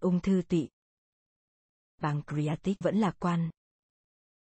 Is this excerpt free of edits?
no; 1 cut; at 2.8 s

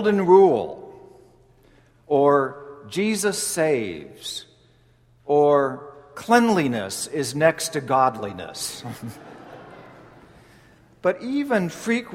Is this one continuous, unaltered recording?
yes; 0 cuts

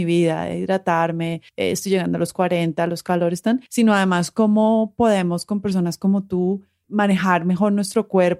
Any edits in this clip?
yes; 2 cuts; at 1.5 s, 3.7 s

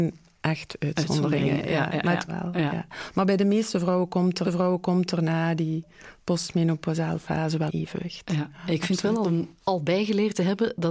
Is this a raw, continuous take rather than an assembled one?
no; 5 cuts; at 2.3 s, 4.4 s, 7.7 s, 9.2 s, 9.6 s

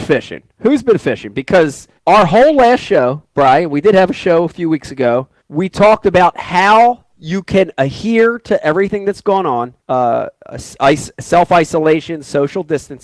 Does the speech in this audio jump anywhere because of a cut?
yes; 4 cuts; at 2.0 s, 5.4 s, 7.1 s, 9.8 s

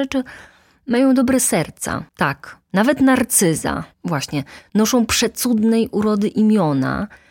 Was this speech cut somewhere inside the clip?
yes; 2 cuts; at 2.1 s, 3.9 s

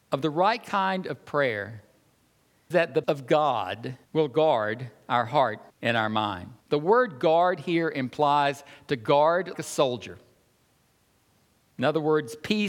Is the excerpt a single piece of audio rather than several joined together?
no; 6 cuts; at 2.7 s, 3.0 s, 4.0 s, 5.7 s, 6.6 s, 9.5 s

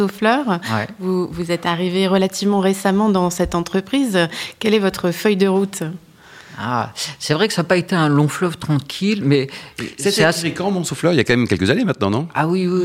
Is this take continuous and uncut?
yes; 0 cuts

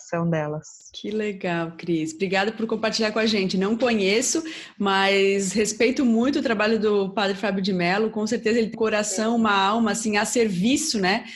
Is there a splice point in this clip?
yes; 1 cut; at 8.7 s

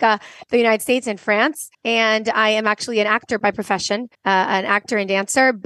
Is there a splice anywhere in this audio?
yes; 2 cuts; at 1.7 s, 4.1 s

